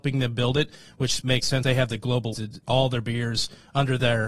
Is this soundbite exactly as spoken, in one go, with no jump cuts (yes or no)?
no